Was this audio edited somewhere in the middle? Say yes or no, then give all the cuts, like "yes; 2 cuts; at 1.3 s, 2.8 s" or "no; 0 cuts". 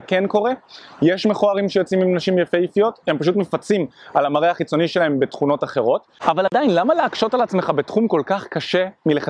no; 0 cuts